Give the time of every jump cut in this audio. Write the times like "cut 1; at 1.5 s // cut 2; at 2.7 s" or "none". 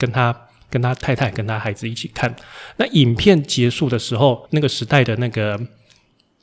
cut 1; at 4.5 s